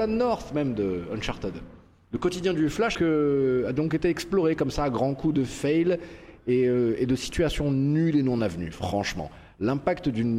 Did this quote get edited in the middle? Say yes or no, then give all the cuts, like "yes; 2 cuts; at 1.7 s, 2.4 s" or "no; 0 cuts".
yes; 1 cut; at 2.9 s